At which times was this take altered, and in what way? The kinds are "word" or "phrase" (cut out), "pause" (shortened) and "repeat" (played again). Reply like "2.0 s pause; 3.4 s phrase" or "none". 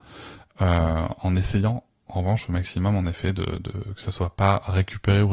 none

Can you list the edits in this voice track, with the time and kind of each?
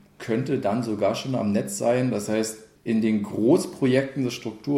2.7 s phrase

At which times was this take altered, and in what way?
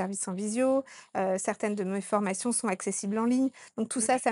none

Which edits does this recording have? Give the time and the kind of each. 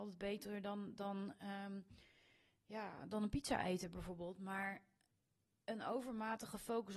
none

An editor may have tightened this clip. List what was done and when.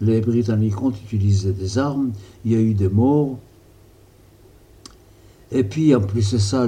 none

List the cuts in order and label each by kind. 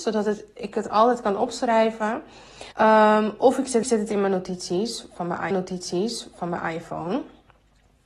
2.7 s pause; 3.8 s repeat; 5.5 s repeat

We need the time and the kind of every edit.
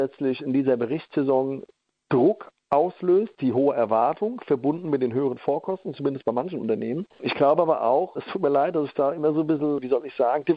none

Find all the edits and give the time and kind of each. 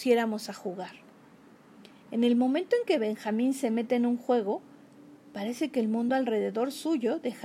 none

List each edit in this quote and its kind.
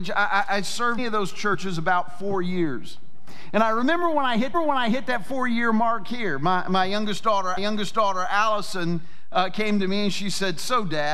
1.0 s phrase; 4.5 s repeat; 7.6 s repeat

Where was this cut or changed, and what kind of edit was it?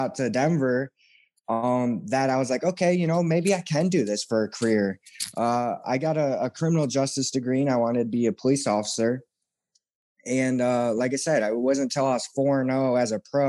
none

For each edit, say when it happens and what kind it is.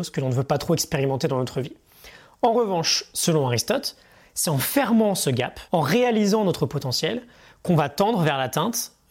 5.7 s pause

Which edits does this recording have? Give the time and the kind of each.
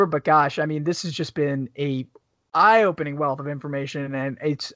none

